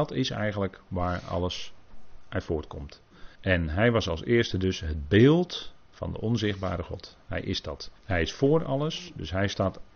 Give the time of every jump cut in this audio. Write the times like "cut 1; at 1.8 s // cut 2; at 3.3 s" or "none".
cut 1; at 3.4 s // cut 2; at 8.0 s